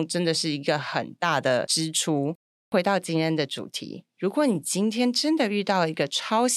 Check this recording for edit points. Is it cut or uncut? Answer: uncut